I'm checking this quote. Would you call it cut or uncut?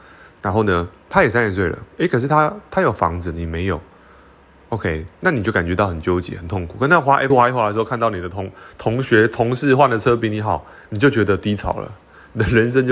cut